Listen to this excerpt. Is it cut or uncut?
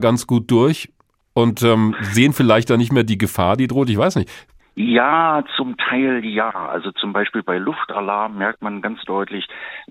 uncut